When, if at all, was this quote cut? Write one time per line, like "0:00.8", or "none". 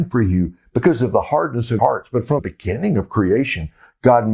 0:01.8
0:02.4